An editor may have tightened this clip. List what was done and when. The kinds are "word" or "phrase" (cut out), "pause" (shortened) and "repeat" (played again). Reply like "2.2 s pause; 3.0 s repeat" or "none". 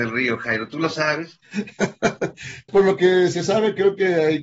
2.7 s word